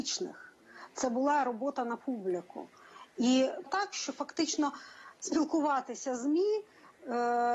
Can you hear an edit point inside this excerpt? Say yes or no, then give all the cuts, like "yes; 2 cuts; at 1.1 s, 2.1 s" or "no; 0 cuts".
yes; 1 cut; at 3.7 s